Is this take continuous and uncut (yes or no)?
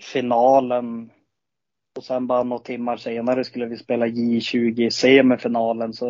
yes